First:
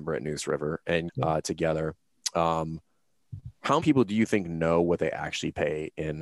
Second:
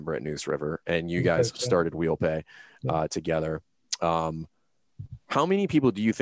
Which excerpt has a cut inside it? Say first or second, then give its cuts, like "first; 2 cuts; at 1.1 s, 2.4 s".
first; 2 cuts; at 1.1 s, 3.8 s